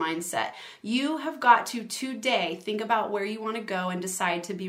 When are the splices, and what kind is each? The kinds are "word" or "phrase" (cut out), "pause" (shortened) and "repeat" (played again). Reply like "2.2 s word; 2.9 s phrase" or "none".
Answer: none